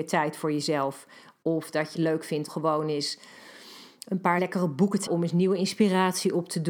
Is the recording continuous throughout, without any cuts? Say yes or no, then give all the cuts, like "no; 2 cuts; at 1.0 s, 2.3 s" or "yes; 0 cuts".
no; 4 cuts; at 1.9 s, 2.5 s, 4.4 s, 5.1 s